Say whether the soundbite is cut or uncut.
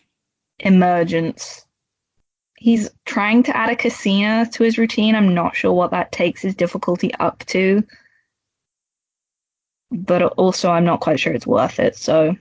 cut